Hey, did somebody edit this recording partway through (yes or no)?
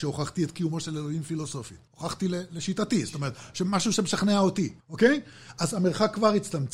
yes